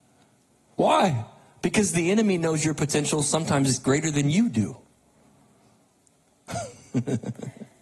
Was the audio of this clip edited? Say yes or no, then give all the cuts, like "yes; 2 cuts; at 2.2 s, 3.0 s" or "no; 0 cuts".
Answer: no; 0 cuts